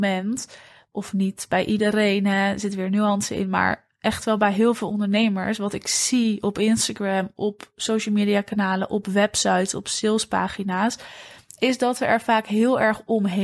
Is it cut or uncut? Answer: uncut